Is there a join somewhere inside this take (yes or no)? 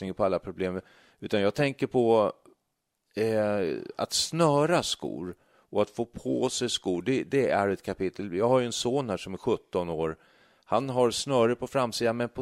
no